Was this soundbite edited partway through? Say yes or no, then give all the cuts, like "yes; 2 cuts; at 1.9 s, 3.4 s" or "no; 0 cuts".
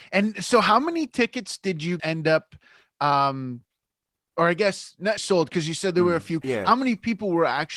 yes; 3 cuts; at 2.0 s, 5.2 s, 6.4 s